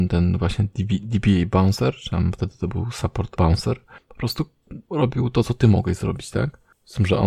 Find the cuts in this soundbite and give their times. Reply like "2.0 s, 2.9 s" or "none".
3.4 s, 5.4 s